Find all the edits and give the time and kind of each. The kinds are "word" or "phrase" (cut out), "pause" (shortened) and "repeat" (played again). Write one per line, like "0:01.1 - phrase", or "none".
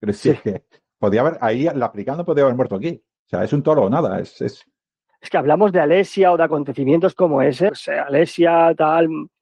0:07.7 - word